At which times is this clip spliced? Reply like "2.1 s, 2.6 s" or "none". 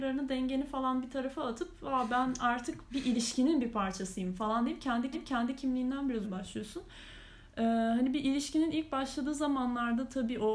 5.1 s, 6.2 s

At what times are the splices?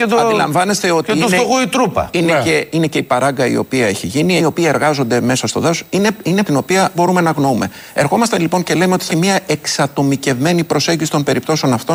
4.4 s, 6.4 s, 6.9 s, 9.1 s

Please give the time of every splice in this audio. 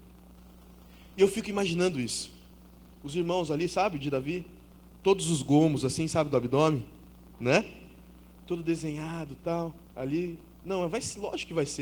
9.9 s

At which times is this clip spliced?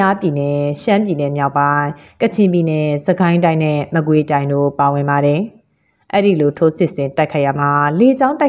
none

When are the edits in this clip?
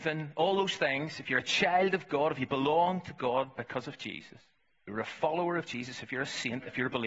4.7 s

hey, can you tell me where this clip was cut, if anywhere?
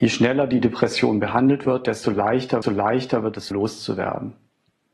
2.6 s, 3.5 s

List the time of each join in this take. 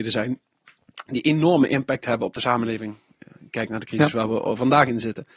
none

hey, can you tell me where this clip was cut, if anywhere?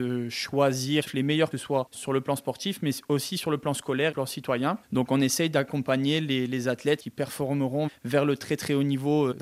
1.5 s, 4.1 s

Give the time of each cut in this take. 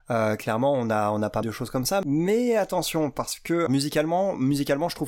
1.4 s, 3.7 s

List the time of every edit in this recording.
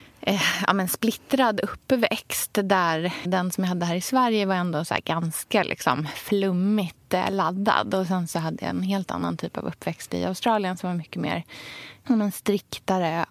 3.2 s

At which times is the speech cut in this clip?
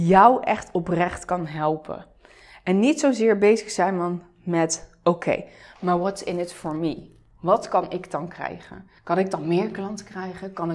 9.0 s

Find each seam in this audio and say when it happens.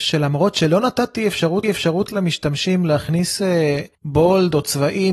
1.6 s, 3.9 s

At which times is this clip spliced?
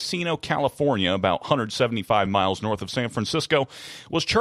none

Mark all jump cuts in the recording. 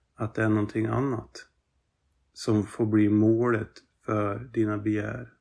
none

